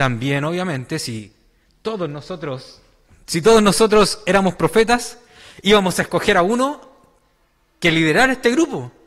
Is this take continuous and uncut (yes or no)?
yes